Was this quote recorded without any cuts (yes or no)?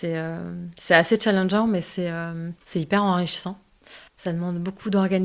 no